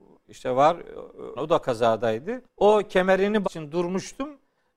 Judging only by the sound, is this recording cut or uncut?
cut